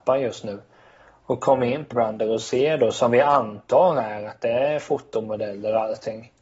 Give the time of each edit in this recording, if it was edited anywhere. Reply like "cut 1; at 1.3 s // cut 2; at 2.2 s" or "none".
cut 1; at 1.9 s